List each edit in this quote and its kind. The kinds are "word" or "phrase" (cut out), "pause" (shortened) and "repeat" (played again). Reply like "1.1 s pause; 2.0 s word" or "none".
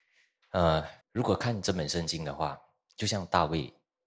1.0 s pause